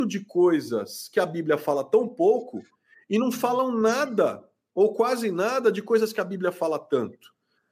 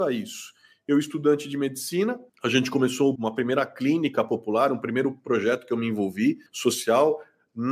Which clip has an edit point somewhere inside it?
second; 3 cuts; at 2.3 s, 3.2 s, 6.5 s

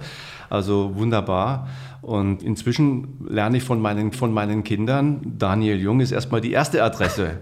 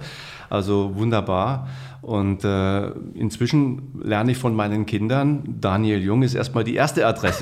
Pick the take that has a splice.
first; 2 cuts; at 2.4 s, 4.1 s

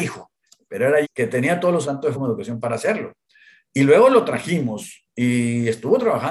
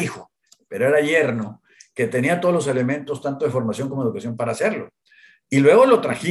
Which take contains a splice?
first; 3 cuts; at 1.0 s, 1.8 s, 2.1 s

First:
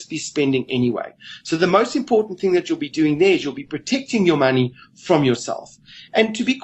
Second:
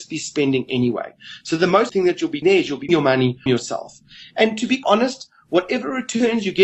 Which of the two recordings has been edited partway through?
second; 5 cuts; at 1.9 s, 2.4 s, 2.9 s, 3.5 s, 4.8 s

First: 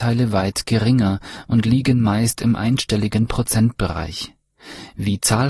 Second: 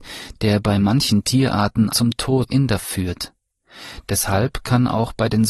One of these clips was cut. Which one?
second; 3 cuts; at 1.9 s, 2.5 s, 2.8 s

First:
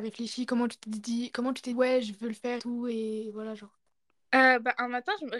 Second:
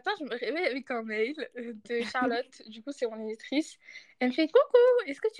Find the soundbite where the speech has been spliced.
first; 2 cuts; at 1.7 s, 2.6 s

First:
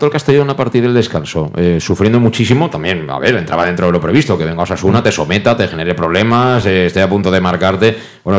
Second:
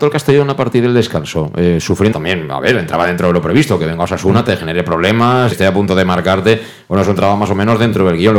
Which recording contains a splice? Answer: second; 3 cuts; at 2.1 s, 4.5 s, 5.5 s

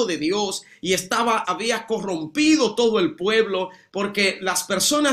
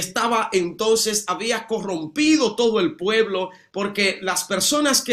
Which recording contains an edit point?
first; 1 cut; at 1.4 s

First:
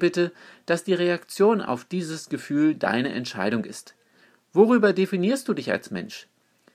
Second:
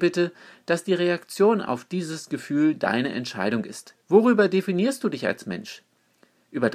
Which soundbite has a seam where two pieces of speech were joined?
second; 1 cut; at 4.0 s

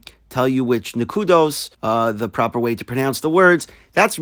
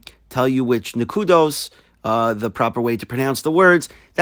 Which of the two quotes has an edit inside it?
first; 1 cut; at 1.7 s

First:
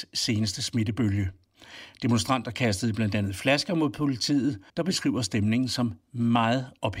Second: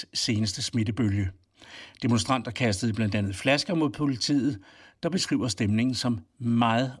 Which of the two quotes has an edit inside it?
first; 1 cut; at 4.7 s

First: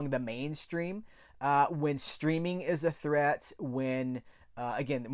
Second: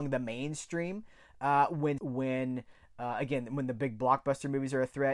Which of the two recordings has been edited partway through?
second; 1 cut; at 2.0 s

